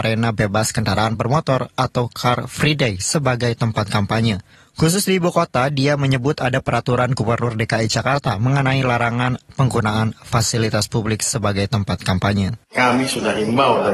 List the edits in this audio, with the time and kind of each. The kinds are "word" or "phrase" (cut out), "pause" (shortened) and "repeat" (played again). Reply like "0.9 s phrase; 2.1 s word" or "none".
none